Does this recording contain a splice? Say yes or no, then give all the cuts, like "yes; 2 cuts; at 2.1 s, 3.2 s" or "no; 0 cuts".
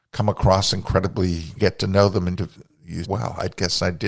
yes; 3 cuts; at 1.6 s, 2.3 s, 3.0 s